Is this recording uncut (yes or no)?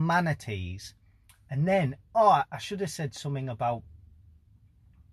yes